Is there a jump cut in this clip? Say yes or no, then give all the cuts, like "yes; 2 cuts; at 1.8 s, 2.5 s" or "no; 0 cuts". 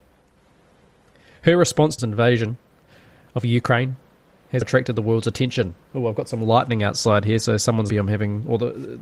yes; 4 cuts; at 2.0 s, 4.6 s, 5.8 s, 7.9 s